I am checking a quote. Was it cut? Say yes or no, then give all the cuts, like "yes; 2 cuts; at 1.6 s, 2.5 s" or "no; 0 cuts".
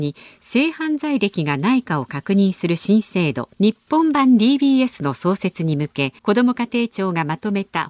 yes; 2 cuts; at 3.5 s, 6.2 s